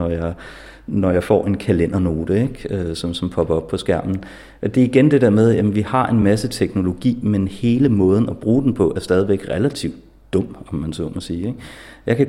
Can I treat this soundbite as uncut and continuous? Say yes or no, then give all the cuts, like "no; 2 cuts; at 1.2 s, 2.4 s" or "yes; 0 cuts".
yes; 0 cuts